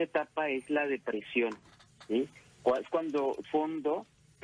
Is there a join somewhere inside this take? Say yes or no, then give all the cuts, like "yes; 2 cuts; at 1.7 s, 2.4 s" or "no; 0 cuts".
yes; 1 cut; at 3.4 s